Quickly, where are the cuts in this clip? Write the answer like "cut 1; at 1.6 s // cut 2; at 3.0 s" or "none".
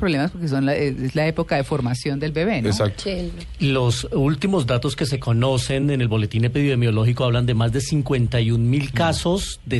none